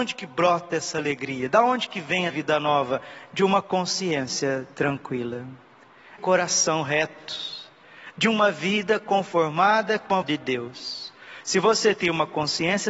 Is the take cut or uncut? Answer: cut